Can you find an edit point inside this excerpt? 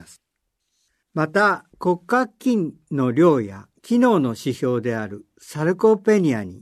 yes; 1 cut; at 1.7 s

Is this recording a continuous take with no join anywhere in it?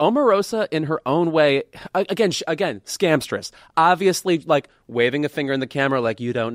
yes; 0 cuts

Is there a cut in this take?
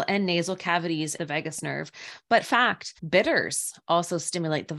yes; 3 cuts; at 1.2 s, 2.4 s, 3.0 s

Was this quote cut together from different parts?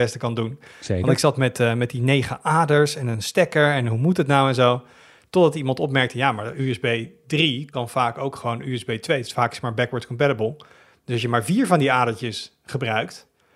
no; 0 cuts

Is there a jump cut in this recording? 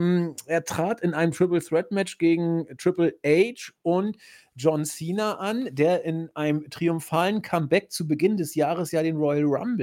no; 0 cuts

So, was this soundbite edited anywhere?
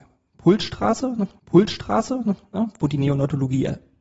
yes; 1 cut; at 1.4 s

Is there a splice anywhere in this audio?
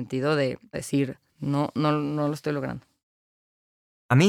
yes; 1 cut; at 1.3 s

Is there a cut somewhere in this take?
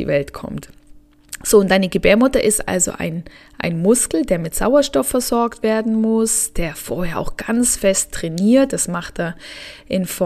no; 0 cuts

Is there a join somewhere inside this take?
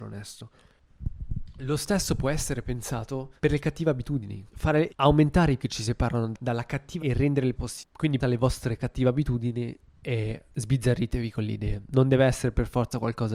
yes; 7 cuts; at 3.4 s, 4.5 s, 4.9 s, 5.6 s, 7.0 s, 7.6 s, 8.2 s

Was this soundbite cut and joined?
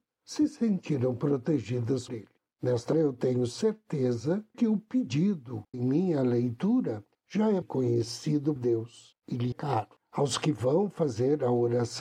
yes; 7 cuts; at 2.1 s, 2.9 s, 4.5 s, 5.7 s, 7.6 s, 8.6 s, 9.5 s

